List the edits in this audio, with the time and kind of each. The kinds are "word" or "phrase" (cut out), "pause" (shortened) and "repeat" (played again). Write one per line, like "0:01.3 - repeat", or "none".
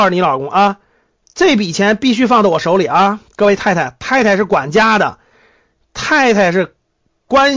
none